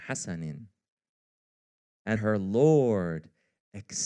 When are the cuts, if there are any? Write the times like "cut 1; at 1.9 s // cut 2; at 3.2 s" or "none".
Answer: cut 1; at 2.2 s

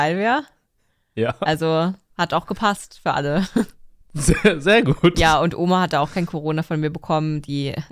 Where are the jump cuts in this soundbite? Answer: none

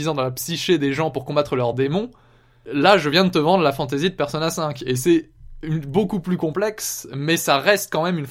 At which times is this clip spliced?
none

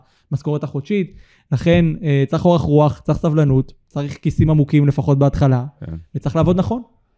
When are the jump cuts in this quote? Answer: none

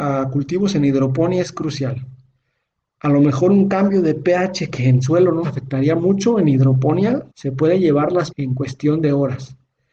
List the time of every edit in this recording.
cut 1; at 5.4 s // cut 2; at 7.3 s // cut 3; at 8.3 s

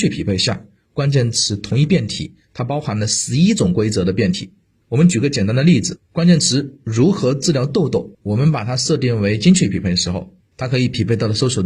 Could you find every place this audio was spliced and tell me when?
cut 1; at 6.0 s // cut 2; at 8.1 s

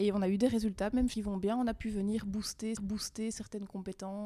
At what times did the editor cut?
cut 1; at 1.1 s // cut 2; at 2.8 s

